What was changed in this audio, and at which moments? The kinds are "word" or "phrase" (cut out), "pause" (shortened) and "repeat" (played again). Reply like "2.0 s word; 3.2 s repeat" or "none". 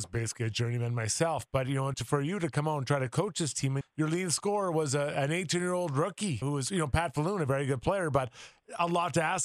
1.9 s word; 3.8 s word; 6.4 s word